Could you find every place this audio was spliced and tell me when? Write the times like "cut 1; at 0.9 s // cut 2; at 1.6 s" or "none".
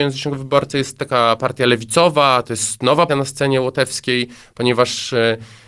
cut 1; at 3.1 s